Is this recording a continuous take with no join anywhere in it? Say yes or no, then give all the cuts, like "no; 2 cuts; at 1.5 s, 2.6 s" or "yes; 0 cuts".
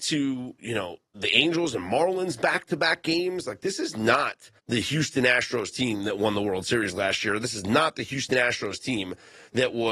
no; 2 cuts; at 1.1 s, 4.6 s